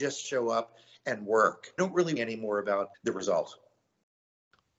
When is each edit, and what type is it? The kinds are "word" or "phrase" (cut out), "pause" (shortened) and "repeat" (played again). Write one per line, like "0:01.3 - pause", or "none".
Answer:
0:01.8 - phrase
0:02.2 - word
0:02.9 - word